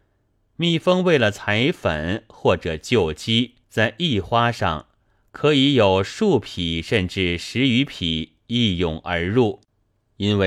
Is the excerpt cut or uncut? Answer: cut